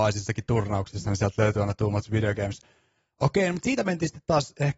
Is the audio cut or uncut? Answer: uncut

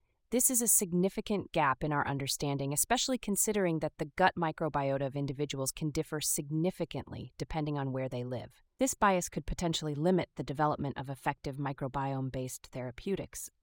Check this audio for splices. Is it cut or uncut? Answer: uncut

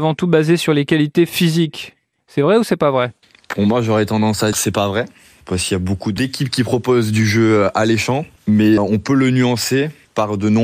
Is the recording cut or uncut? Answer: cut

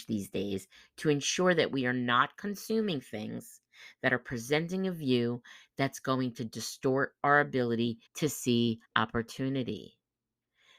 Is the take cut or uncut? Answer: cut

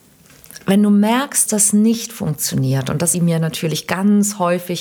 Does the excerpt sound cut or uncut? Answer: cut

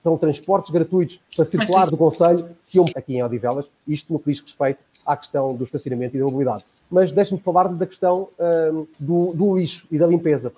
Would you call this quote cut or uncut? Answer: cut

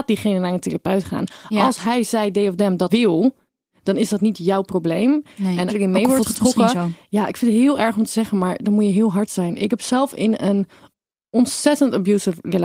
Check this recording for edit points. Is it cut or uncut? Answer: cut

